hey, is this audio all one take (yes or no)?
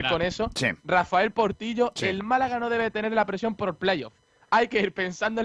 yes